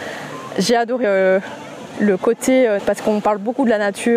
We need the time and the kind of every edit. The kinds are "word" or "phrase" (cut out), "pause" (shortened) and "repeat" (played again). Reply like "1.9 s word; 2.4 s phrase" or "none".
1.0 s word; 2.8 s word